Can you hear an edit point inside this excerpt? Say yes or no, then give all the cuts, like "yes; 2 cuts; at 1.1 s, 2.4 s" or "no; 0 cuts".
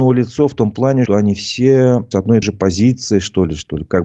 yes; 3 cuts; at 1.1 s, 2.1 s, 2.4 s